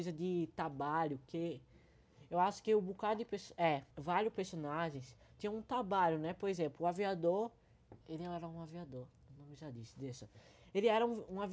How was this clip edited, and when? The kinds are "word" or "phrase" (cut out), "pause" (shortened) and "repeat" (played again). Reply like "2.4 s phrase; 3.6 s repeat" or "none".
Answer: 3.9 s pause; 8.0 s pause